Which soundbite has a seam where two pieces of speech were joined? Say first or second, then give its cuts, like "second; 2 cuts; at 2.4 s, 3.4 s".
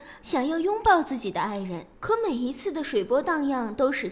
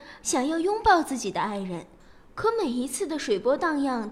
first; 1 cut; at 1.9 s